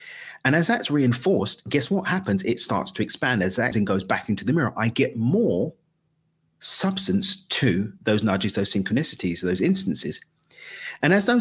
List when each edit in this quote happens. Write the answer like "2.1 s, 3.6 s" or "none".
3.7 s